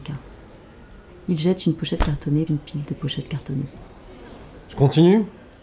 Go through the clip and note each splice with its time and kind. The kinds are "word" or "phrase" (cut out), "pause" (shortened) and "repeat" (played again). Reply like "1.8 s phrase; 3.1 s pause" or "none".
2.5 s word